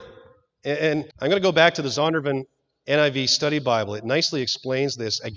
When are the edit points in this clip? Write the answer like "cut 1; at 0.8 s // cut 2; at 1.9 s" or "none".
cut 1; at 1.1 s